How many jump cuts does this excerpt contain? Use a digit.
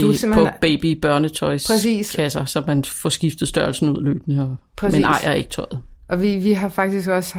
0